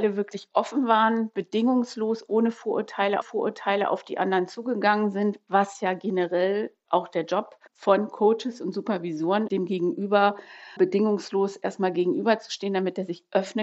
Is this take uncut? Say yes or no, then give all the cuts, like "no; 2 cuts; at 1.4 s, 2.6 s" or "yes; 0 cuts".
no; 4 cuts; at 3.2 s, 7.7 s, 9.5 s, 10.8 s